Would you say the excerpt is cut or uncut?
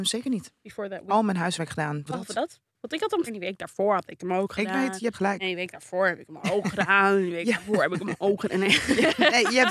cut